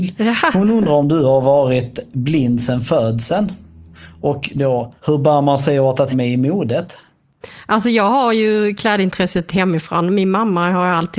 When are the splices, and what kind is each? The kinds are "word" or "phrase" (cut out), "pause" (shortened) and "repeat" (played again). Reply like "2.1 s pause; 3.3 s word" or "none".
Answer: 5.0 s pause; 6.1 s word